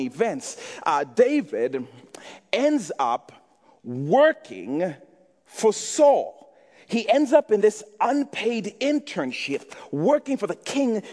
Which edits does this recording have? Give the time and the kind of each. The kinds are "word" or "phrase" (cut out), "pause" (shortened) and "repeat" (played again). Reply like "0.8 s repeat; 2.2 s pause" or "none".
none